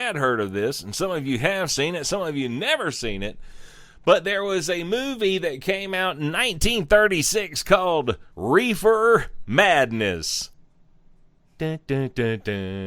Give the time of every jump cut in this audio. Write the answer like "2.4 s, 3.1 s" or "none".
8.3 s